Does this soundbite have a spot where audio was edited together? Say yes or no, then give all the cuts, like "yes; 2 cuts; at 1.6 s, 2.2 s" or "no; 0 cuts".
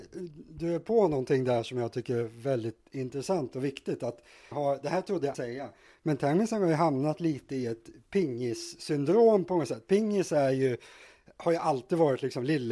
yes; 2 cuts; at 4.5 s, 5.3 s